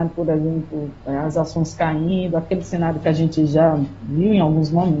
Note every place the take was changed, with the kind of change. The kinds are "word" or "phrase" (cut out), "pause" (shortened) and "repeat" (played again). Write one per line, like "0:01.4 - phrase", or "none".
none